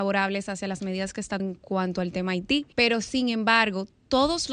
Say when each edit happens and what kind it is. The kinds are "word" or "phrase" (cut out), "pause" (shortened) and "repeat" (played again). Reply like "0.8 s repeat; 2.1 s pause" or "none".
1.4 s phrase; 2.7 s pause